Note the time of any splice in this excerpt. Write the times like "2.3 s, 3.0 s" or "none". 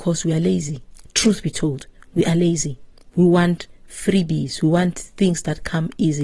none